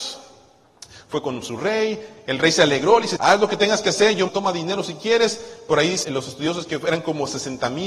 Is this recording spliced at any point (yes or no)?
yes